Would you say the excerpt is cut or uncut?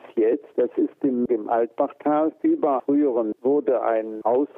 cut